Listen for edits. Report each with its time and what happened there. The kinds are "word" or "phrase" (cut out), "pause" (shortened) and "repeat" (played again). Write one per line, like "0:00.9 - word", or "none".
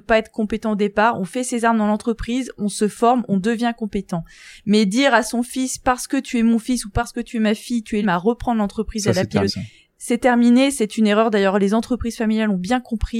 0:08.0 - word
0:09.5 - word